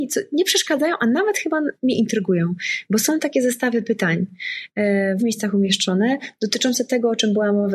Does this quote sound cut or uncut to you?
cut